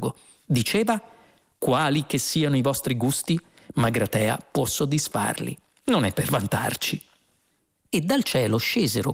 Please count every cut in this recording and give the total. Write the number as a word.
zero